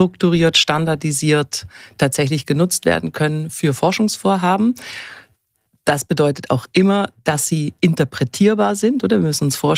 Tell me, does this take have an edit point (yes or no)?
no